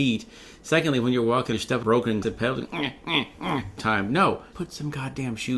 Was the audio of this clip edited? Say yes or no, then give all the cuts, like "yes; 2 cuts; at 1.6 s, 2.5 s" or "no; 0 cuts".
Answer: yes; 6 cuts; at 1.5 s, 1.8 s, 2.2 s, 2.7 s, 3.8 s, 4.5 s